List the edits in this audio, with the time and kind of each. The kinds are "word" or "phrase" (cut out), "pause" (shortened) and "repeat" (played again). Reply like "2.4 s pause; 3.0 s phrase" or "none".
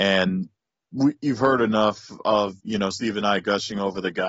2.6 s pause